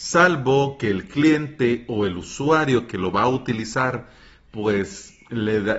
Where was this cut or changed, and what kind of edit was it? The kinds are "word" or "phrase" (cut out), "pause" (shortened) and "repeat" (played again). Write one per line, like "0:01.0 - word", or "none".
none